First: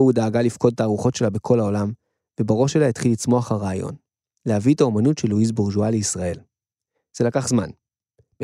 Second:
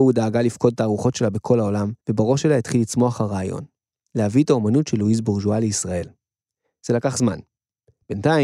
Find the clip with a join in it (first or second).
second